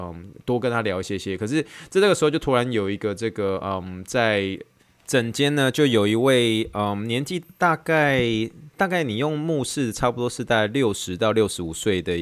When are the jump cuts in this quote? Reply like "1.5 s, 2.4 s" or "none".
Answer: none